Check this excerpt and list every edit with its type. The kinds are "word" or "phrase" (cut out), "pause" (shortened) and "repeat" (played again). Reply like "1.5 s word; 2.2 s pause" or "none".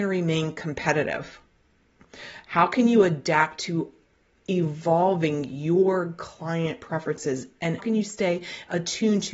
7.8 s word